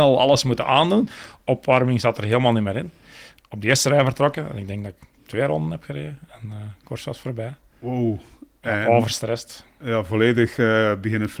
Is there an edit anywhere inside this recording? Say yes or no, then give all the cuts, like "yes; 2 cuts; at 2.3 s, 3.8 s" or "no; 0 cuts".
no; 0 cuts